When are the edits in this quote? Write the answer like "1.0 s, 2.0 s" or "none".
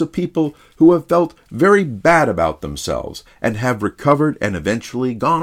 none